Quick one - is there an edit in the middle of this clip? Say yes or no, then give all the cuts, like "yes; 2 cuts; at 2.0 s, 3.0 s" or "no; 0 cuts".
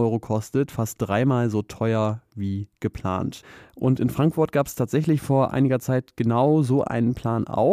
no; 0 cuts